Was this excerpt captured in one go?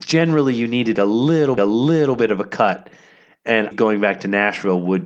no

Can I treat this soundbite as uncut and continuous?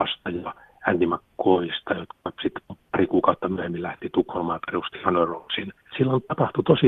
yes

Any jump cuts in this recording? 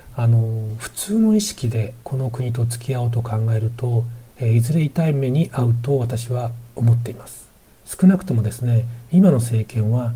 yes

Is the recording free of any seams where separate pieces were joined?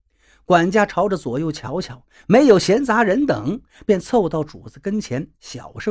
yes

